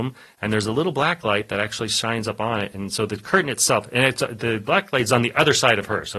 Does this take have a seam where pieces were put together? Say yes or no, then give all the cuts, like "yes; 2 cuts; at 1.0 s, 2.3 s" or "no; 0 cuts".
no; 0 cuts